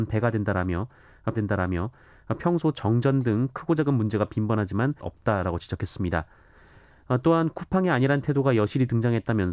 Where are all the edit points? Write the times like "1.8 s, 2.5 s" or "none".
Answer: 1.3 s, 5.0 s